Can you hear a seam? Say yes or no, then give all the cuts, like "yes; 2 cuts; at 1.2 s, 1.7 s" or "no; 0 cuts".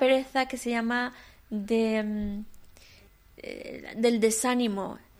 no; 0 cuts